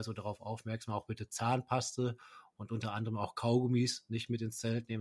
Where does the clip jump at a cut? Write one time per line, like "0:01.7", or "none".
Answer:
none